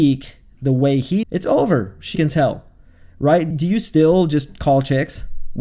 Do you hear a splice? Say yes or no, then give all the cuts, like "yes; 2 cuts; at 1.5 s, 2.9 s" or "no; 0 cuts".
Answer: yes; 3 cuts; at 1.2 s, 2.2 s, 3.5 s